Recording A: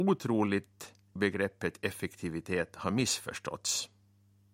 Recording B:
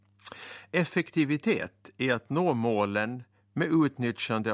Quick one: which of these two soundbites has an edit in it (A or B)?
A